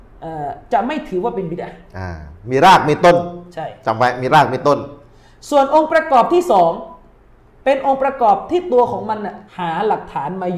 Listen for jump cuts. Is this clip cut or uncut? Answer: cut